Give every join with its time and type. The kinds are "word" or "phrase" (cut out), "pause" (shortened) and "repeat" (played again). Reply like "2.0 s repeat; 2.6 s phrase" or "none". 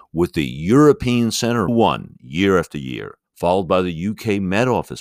1.7 s phrase; 3.3 s pause